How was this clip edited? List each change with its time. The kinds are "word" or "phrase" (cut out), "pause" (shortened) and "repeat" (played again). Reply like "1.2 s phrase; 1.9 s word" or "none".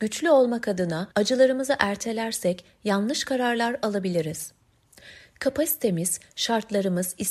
1.1 s pause

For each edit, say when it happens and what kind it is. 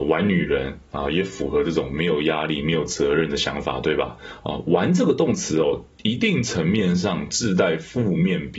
5.9 s pause

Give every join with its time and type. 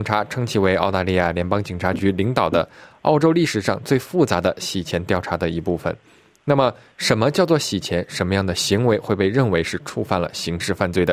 none

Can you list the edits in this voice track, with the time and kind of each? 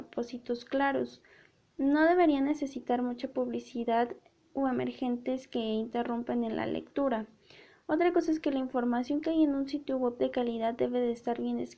none

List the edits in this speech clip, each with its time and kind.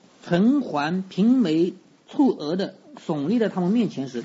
none

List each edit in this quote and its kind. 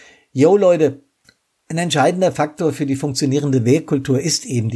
1.2 s pause

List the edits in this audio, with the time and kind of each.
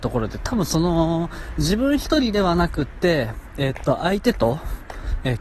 none

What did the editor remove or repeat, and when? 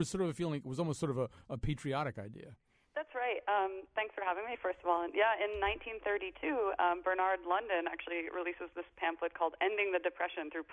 none

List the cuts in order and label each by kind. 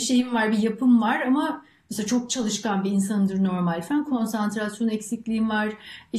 none

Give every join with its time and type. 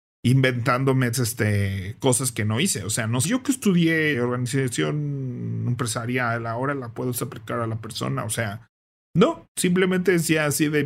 1.1 s word; 3.2 s phrase; 4.1 s word

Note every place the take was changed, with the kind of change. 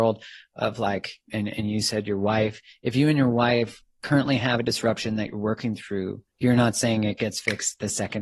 6.3 s pause

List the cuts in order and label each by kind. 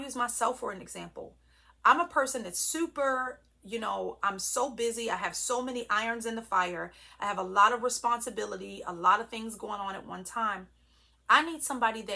none

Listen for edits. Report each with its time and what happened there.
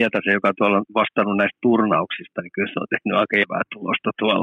3.4 s word

